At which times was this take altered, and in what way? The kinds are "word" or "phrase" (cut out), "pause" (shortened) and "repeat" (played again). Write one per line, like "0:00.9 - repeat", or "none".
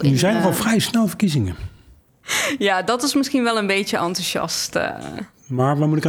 none